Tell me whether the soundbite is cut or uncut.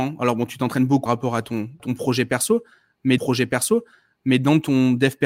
cut